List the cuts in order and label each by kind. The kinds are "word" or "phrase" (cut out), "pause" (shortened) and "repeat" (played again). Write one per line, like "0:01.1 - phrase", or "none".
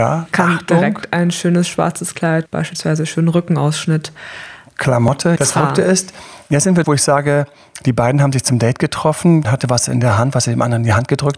0:02.5 - word
0:05.4 - word
0:06.8 - word
0:09.4 - word